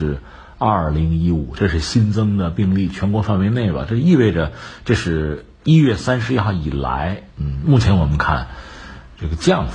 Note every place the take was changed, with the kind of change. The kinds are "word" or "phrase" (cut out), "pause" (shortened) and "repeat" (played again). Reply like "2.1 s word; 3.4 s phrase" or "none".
7.3 s pause